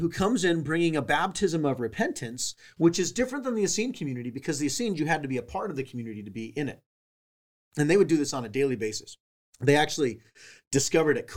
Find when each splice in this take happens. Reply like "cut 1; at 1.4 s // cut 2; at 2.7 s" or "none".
cut 1; at 9.3 s